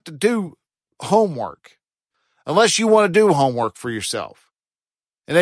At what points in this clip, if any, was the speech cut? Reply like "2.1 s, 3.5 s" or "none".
none